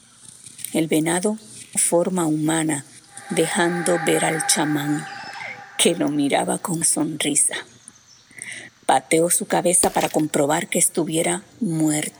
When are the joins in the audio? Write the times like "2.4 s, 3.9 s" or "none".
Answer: 1.8 s, 6.8 s